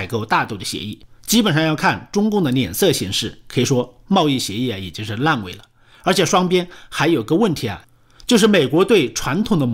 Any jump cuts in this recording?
no; 0 cuts

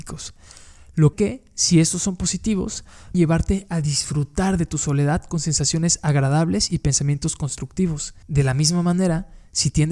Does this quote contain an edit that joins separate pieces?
yes; 3 cuts; at 1.1 s, 3.1 s, 8.2 s

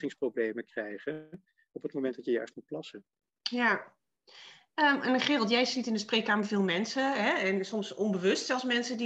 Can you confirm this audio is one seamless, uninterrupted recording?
yes; 0 cuts

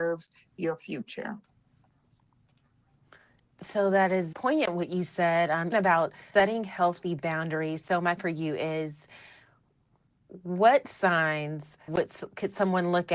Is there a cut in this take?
yes; 5 cuts; at 4.3 s, 5.7 s, 6.3 s, 8.2 s, 11.9 s

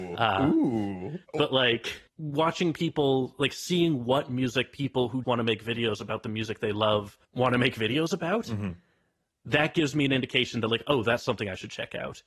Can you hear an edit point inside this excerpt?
yes; 4 cuts; at 1.2 s, 2.1 s, 5.2 s, 7.2 s

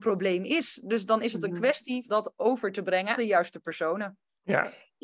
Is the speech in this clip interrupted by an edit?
yes; 2 cuts; at 2.1 s, 3.2 s

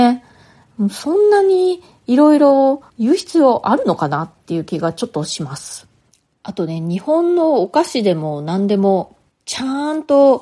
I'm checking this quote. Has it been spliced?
yes; 1 cut; at 2.9 s

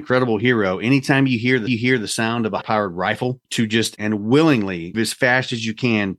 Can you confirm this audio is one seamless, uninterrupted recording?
no; 5 cuts; at 1.7 s, 2.6 s, 3.4 s, 4.0 s, 4.9 s

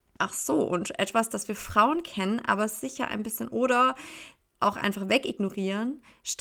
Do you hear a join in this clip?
yes; 1 cut; at 3.5 s

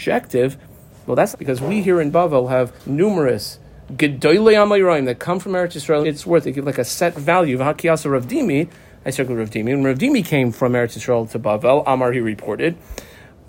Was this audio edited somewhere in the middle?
yes; 3 cuts; at 1.3 s, 2.8 s, 6.0 s

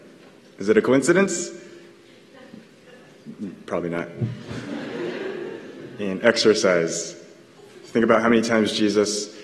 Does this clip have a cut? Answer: no; 0 cuts

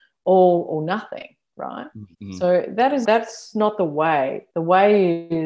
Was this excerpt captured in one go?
no; 3 cuts; at 2.1 s, 3.0 s, 4.5 s

